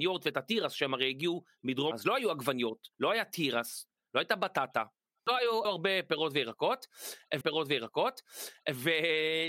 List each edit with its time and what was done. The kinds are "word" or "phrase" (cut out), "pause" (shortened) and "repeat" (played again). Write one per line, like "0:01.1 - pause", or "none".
0:01.9 - word
0:02.9 - pause
0:05.6 - phrase
0:07.4 - repeat